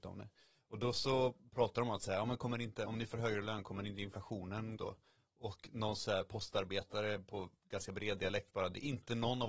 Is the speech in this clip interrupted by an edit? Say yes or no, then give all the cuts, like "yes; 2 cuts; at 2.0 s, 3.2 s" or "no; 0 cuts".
yes; 1 cut; at 4.8 s